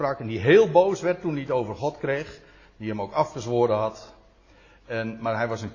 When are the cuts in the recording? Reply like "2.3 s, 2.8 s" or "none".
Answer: none